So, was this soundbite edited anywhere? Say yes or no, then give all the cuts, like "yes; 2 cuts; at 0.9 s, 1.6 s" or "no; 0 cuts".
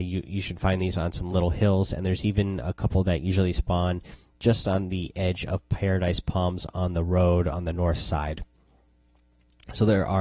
no; 0 cuts